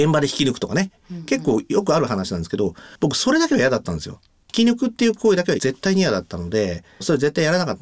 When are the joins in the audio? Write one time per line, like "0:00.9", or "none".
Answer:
none